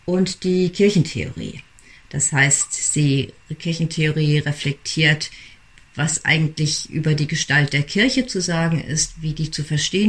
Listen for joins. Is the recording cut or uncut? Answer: uncut